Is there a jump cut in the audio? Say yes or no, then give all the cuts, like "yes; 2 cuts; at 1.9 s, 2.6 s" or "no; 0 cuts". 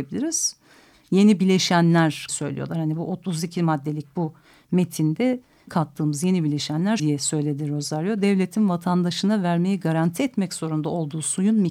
yes; 3 cuts; at 2.3 s, 5.7 s, 7.0 s